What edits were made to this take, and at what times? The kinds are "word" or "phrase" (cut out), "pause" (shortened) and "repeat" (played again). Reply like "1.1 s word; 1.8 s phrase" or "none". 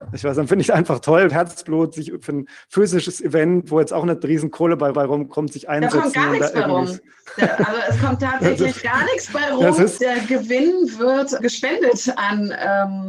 1.3 s phrase; 4.9 s repeat; 8.8 s phrase; 10.0 s word; 11.4 s word